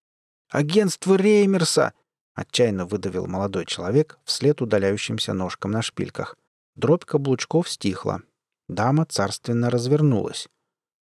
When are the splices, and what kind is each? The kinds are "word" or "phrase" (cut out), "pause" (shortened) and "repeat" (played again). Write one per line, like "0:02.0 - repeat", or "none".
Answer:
0:02.0 - pause
0:06.5 - pause